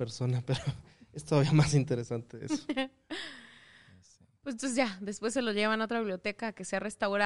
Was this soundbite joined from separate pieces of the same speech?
no; 0 cuts

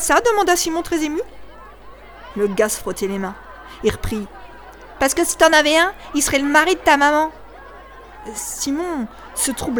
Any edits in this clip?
no; 0 cuts

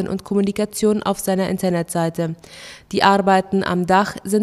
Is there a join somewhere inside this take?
no; 0 cuts

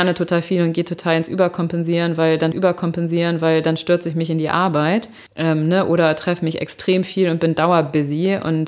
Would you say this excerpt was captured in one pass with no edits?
no; 2 cuts; at 2.5 s, 5.3 s

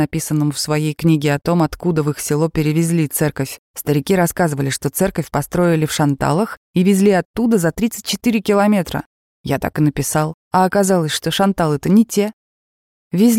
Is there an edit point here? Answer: yes; 2 cuts; at 3.6 s, 10.4 s

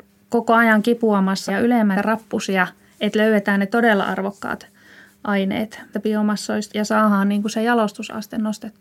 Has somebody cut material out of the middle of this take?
yes; 4 cuts; at 1.5 s, 1.9 s, 5.9 s, 6.7 s

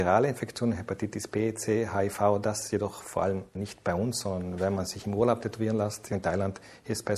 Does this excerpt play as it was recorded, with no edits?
no; 1 cut; at 3.5 s

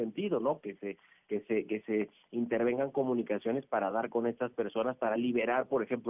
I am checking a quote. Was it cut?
no; 0 cuts

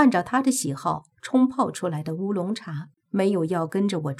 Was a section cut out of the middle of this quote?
yes; 1 cut; at 3.0 s

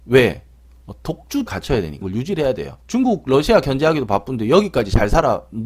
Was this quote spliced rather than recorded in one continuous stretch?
yes; 3 cuts; at 1.5 s, 2.0 s, 2.8 s

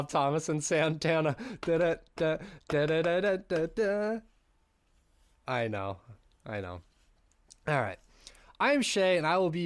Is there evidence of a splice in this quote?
no; 0 cuts

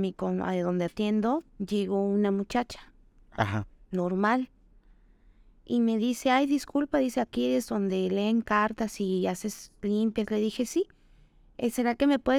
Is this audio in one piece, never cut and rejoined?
no; 1 cut; at 1.5 s

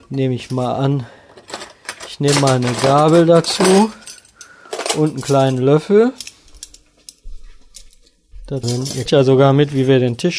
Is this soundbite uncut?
no; 2 cuts; at 8.6 s, 9.1 s

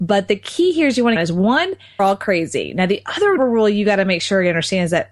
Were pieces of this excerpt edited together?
yes; 3 cuts; at 1.2 s, 2.0 s, 3.4 s

